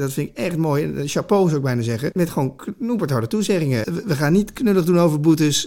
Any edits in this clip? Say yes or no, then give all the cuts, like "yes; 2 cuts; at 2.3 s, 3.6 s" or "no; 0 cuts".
no; 0 cuts